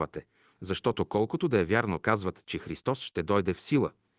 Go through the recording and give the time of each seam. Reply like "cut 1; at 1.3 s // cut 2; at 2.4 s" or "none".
cut 1; at 2.0 s